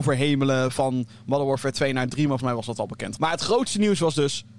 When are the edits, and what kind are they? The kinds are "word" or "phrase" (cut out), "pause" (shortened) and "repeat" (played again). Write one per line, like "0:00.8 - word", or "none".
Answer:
0:02.4 - word
0:03.2 - word